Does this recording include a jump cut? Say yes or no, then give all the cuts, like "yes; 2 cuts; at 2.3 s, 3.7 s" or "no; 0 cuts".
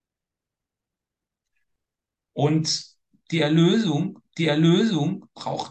yes; 1 cut; at 4.2 s